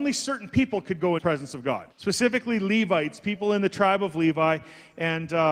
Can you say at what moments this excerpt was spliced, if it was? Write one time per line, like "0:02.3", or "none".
0:01.2
0:01.9